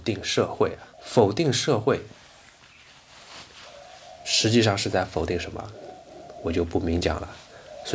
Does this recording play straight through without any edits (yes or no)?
no